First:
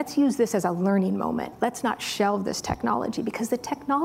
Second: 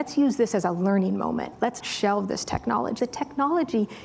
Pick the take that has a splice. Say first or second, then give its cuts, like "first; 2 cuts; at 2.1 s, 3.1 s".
second; 2 cuts; at 1.8 s, 3.0 s